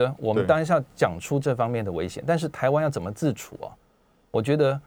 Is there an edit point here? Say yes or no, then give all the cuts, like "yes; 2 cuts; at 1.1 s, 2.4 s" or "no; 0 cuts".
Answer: no; 0 cuts